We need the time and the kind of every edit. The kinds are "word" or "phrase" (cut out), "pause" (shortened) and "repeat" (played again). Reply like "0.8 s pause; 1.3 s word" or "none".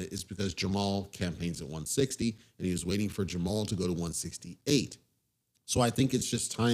none